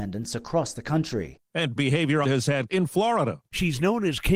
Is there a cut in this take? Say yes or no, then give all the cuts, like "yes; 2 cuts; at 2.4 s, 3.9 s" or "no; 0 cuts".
yes; 3 cuts; at 1.8 s, 2.2 s, 2.7 s